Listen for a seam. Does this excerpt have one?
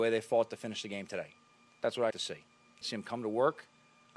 yes; 2 cuts; at 2.1 s, 2.8 s

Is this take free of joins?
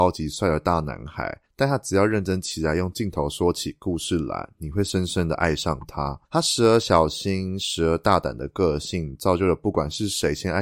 no; 2 cuts; at 1.5 s, 6.3 s

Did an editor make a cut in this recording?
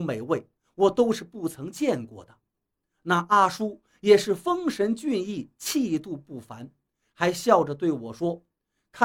no; 0 cuts

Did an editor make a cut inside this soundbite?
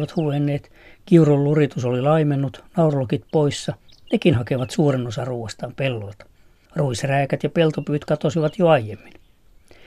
no; 0 cuts

